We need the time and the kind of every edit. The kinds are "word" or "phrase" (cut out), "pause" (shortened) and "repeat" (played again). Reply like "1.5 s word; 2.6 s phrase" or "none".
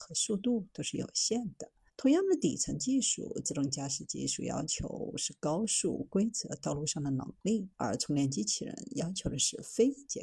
1.9 s pause; 7.7 s pause